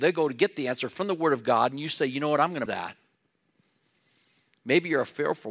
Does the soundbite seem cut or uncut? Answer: cut